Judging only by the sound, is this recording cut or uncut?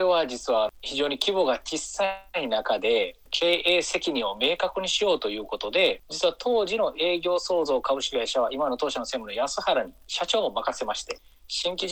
cut